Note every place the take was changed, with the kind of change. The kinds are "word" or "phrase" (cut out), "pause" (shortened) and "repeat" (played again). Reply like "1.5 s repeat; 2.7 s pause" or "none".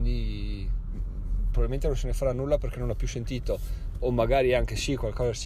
none